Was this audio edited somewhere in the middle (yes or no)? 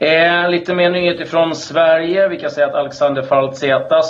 no